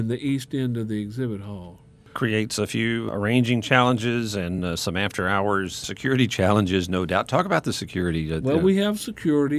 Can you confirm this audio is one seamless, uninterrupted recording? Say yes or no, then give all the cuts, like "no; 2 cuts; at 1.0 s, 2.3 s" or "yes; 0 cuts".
yes; 0 cuts